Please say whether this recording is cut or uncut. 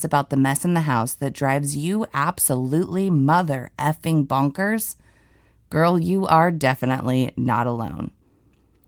uncut